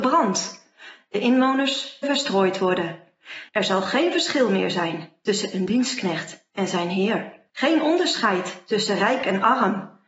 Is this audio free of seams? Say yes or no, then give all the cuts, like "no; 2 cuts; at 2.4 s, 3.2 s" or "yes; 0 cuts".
no; 3 cuts; at 2.0 s, 3.5 s, 7.5 s